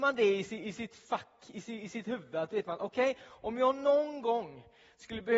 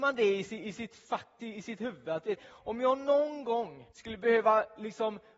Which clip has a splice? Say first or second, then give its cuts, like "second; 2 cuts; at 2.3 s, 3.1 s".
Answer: second; 3 cuts; at 1.4 s, 2.4 s, 3.9 s